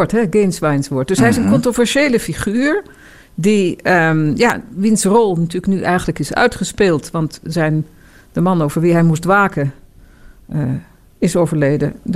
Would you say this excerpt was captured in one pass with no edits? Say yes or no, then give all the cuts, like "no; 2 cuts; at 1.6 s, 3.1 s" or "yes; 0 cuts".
yes; 0 cuts